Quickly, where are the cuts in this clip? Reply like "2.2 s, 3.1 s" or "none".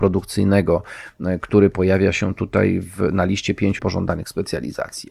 3.8 s